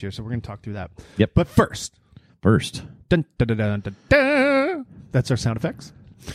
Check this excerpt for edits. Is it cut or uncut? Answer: cut